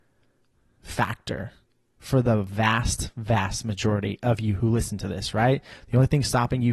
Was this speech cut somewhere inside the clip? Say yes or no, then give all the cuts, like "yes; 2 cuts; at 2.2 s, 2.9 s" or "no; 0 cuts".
no; 0 cuts